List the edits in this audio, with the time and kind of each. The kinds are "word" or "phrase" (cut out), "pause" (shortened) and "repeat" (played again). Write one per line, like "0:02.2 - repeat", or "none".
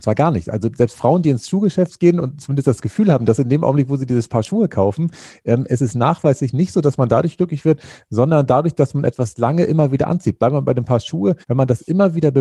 0:11.4 - pause